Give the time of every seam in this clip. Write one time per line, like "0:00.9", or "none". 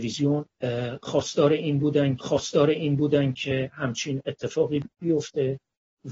0:02.2
0:04.9